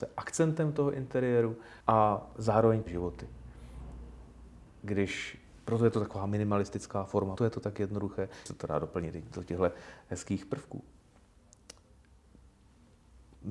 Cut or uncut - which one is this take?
cut